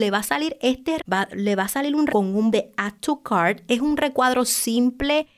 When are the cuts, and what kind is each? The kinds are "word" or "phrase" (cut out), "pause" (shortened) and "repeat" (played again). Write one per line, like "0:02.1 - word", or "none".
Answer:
0:01.0 - word
0:02.1 - word
0:02.5 - word